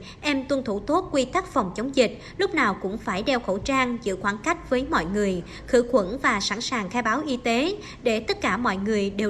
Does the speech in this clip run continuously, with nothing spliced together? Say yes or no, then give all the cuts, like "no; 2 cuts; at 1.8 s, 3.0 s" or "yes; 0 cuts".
yes; 0 cuts